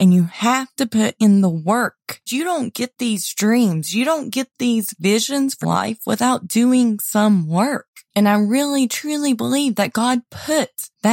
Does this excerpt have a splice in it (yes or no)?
yes